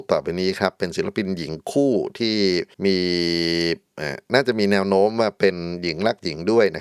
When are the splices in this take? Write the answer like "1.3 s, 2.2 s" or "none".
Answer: 2.7 s